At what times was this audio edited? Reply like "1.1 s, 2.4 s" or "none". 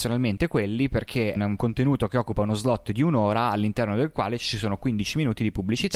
1.4 s